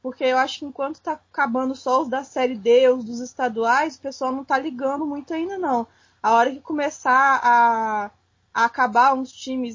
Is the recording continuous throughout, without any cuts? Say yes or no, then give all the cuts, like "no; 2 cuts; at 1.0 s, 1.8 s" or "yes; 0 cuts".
yes; 0 cuts